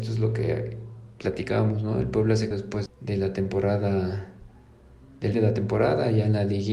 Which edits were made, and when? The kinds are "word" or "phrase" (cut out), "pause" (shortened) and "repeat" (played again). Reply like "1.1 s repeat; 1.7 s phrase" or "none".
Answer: 2.5 s word; 2.9 s word; 5.3 s word